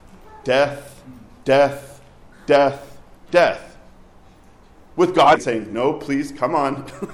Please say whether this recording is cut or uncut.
cut